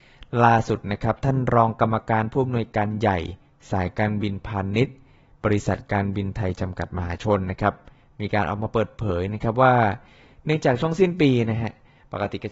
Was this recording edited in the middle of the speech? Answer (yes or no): no